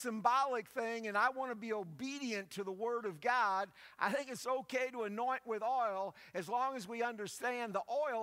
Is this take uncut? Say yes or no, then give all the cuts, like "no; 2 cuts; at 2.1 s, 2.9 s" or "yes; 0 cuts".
yes; 0 cuts